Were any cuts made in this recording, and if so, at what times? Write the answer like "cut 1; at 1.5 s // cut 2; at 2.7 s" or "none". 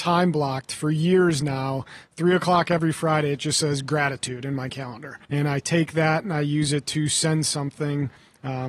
cut 1; at 5.2 s